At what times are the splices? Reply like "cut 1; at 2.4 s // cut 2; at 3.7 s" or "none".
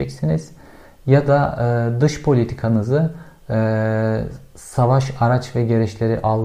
none